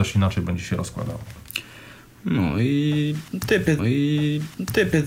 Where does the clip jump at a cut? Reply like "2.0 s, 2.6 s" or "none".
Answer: 3.8 s